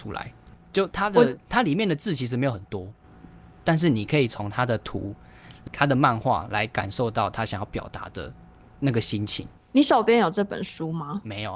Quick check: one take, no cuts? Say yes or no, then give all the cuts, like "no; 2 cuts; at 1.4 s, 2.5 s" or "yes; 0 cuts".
yes; 0 cuts